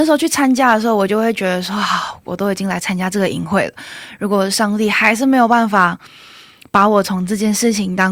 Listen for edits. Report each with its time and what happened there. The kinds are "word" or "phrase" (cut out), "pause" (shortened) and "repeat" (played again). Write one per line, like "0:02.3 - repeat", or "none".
none